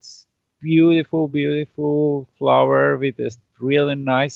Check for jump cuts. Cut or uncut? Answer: uncut